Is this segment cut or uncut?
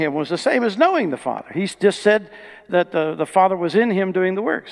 uncut